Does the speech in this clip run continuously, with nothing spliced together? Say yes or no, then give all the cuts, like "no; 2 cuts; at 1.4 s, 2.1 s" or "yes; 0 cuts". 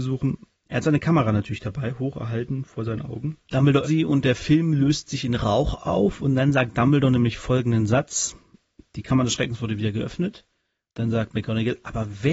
no; 1 cut; at 3.8 s